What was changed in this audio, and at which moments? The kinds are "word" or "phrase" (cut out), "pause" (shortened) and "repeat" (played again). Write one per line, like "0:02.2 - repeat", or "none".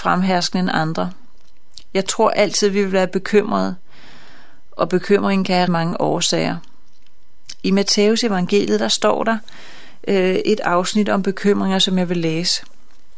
0:05.7 - word